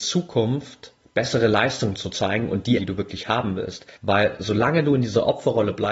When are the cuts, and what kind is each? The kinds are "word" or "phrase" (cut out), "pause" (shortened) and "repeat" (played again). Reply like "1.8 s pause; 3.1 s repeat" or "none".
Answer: 1.0 s pause; 2.8 s phrase; 4.0 s pause